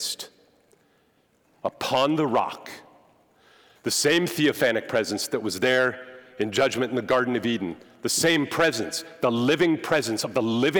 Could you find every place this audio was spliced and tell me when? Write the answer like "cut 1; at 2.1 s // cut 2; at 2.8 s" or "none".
none